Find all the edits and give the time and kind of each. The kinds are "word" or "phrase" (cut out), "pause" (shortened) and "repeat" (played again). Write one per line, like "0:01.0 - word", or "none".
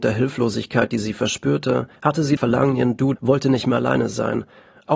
0:02.0 - pause
0:02.4 - word
0:03.2 - word